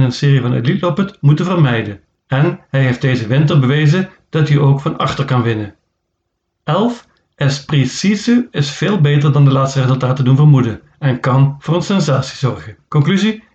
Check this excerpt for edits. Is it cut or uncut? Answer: uncut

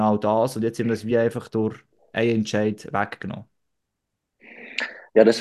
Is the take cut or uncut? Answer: uncut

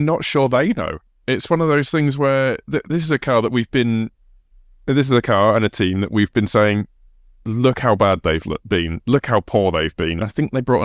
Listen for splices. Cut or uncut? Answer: uncut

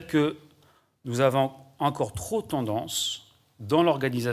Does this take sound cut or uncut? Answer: uncut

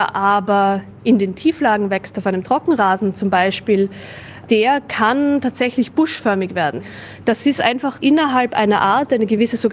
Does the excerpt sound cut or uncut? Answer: uncut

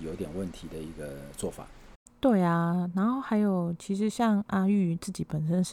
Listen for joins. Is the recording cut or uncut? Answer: uncut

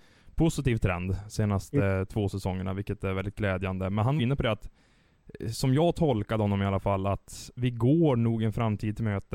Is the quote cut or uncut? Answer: cut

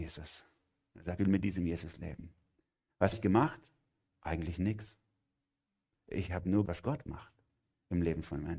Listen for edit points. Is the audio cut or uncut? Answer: cut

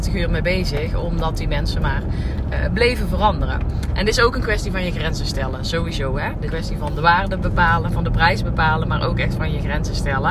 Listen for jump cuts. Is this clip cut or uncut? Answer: cut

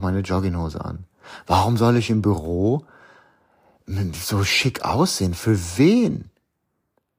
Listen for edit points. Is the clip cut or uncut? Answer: uncut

